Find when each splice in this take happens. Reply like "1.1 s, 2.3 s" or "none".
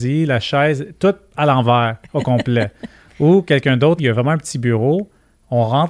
4.0 s